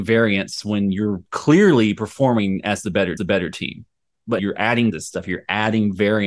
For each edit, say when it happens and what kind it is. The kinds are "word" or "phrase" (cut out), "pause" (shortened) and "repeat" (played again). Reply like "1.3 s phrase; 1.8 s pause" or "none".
1.3 s pause; 3.2 s repeat; 4.4 s word; 4.9 s phrase